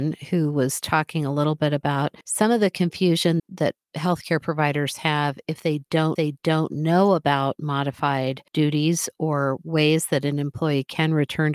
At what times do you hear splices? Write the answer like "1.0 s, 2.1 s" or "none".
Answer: 2.2 s, 3.4 s, 3.8 s, 6.2 s, 8.5 s